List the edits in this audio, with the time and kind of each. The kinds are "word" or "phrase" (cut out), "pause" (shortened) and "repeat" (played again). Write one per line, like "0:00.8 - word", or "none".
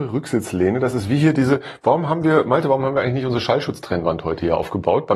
none

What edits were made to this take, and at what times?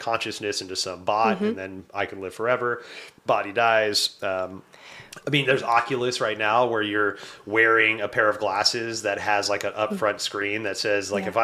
0:03.2 - pause

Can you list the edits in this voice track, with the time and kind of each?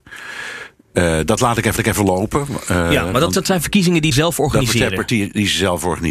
0:01.8 - repeat
0:04.1 - phrase

